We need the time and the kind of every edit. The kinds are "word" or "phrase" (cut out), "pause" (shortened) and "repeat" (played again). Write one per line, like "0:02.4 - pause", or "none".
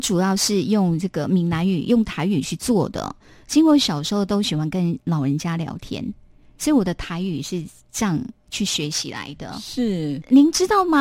none